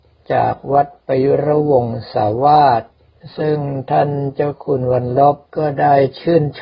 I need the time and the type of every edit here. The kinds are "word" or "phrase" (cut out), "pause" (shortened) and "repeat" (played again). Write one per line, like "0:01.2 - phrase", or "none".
0:05.5 - pause

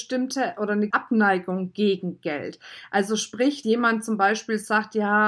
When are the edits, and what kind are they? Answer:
0:00.9 - word
0:03.6 - word

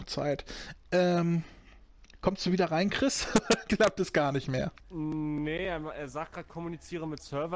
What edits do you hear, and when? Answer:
0:04.8 - pause

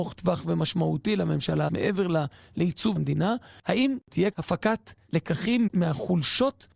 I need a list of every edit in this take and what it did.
0:01.7 - word
0:03.0 - word
0:04.3 - word
0:05.7 - word

